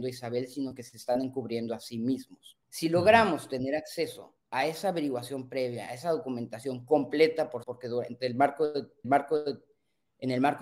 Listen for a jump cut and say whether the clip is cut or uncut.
cut